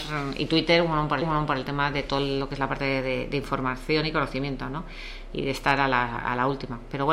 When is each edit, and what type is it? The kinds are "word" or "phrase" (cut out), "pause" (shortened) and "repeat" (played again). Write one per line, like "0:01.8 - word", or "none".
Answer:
0:01.2 - repeat